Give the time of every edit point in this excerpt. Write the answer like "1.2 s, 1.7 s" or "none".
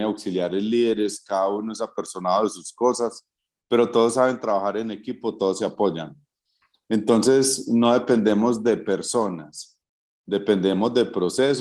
none